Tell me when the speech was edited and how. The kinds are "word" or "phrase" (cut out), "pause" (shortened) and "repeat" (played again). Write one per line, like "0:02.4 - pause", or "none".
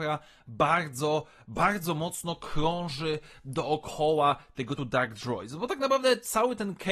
0:04.8 - word